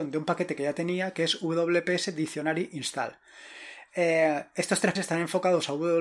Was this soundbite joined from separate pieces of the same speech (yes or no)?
yes